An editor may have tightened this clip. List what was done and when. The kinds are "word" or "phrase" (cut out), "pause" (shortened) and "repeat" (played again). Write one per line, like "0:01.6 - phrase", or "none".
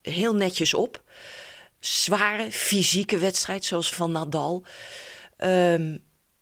0:03.9 - phrase